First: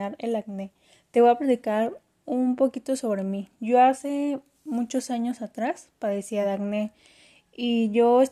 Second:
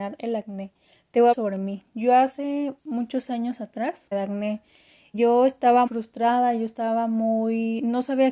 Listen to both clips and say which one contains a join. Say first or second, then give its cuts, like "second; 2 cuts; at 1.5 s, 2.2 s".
second; 5 cuts; at 1.3 s, 2.8 s, 4.1 s, 5.1 s, 5.9 s